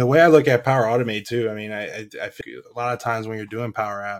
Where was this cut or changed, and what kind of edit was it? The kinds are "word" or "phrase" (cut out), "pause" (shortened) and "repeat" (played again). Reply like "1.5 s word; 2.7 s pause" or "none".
2.4 s word